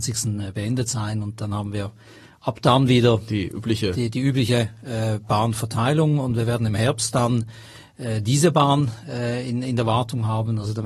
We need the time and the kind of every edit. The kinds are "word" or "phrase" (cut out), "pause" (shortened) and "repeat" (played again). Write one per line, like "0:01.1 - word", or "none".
none